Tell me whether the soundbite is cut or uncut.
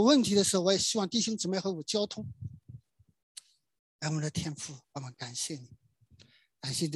cut